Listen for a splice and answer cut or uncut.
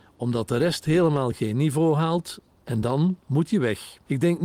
uncut